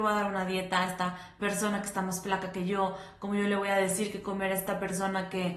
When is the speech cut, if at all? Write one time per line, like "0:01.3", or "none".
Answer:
none